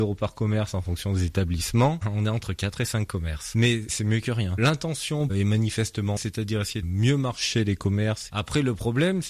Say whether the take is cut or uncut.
cut